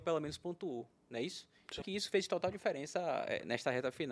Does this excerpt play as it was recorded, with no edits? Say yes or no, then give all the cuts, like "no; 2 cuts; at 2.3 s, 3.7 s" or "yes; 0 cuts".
no; 1 cut; at 1.8 s